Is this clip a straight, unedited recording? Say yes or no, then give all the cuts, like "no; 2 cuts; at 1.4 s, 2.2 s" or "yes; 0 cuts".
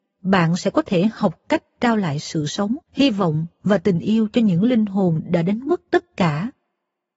no; 1 cut; at 2.8 s